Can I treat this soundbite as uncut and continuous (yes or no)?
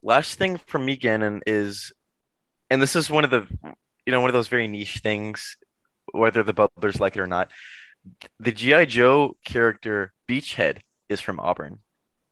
yes